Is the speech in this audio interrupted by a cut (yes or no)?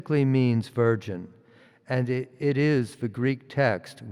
no